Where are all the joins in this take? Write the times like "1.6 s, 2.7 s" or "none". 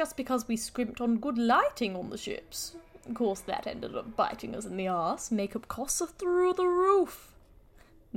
none